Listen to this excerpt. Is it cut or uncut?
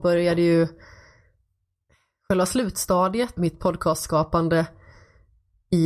cut